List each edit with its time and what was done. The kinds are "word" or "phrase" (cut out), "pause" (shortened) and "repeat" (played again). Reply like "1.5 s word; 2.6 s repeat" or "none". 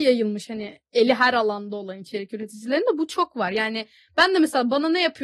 none